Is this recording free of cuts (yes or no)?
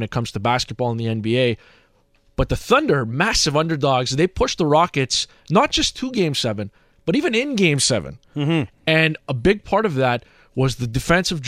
yes